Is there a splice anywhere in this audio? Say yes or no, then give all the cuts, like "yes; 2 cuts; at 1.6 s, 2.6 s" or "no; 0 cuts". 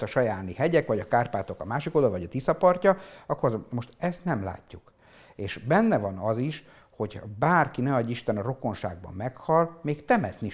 no; 0 cuts